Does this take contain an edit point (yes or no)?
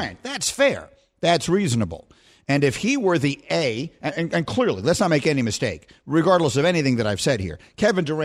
no